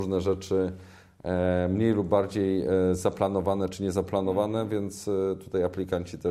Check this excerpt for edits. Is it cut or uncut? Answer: uncut